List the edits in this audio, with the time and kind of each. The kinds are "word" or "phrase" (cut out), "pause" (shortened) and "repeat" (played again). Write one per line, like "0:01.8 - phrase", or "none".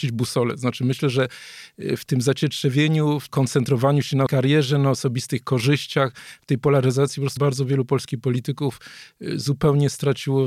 0:03.3 - word
0:04.3 - word
0:07.4 - word